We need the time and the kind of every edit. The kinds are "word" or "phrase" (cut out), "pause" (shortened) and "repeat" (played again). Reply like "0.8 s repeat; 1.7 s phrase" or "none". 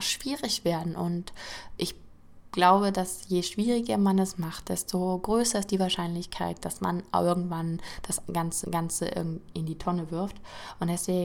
1.8 s word; 8.6 s repeat